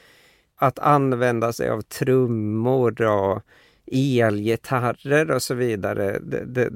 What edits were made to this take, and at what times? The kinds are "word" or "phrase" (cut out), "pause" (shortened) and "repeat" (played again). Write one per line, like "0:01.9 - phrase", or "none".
none

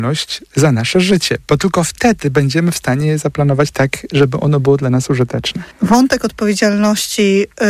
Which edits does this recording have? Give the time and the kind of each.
0:05.7 - pause

